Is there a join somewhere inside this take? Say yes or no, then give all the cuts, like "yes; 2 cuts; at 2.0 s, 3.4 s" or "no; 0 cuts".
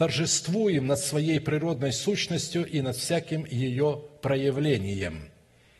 no; 0 cuts